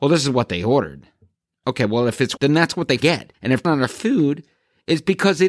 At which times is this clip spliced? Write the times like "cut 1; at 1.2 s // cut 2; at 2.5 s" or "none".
cut 1; at 1.3 s // cut 2; at 2.4 s // cut 3; at 3.0 s // cut 4; at 3.3 s // cut 5; at 3.6 s